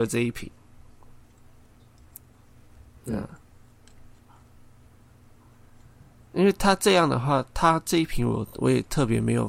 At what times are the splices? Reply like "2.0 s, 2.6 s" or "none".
none